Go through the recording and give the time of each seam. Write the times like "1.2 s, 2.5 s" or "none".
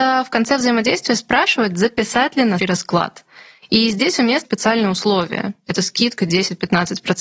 2.6 s, 4.4 s, 5.7 s